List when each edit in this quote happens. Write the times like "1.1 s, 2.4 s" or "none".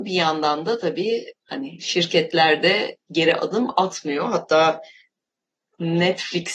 1.3 s, 3.1 s